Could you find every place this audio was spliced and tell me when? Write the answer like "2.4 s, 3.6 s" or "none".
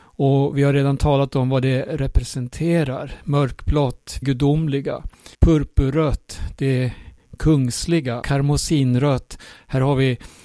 4.2 s, 5.3 s, 8.2 s